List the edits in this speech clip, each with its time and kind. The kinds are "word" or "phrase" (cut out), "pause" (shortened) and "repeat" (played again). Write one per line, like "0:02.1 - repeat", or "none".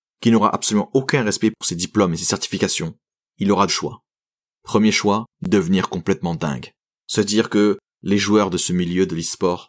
0:03.7 - word

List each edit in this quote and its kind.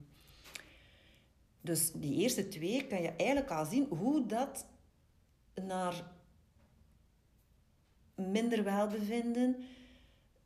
none

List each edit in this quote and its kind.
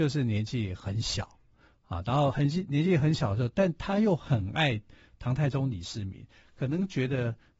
none

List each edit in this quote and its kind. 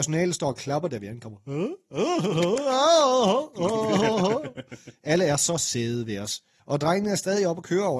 0:06.6 - pause

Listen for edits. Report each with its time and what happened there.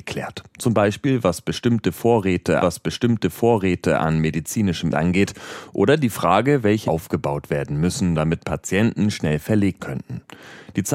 0:02.6 - repeat
0:04.9 - word
0:06.9 - word
0:09.8 - word

